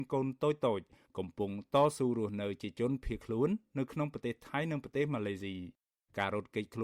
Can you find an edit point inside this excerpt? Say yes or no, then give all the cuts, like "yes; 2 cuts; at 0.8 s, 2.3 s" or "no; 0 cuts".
no; 0 cuts